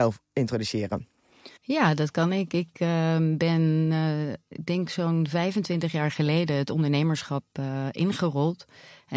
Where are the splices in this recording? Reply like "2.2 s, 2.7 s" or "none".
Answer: 1.6 s